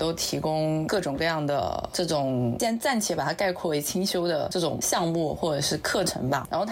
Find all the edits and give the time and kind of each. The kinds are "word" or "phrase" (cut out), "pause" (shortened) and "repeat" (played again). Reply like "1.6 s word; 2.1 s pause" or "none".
none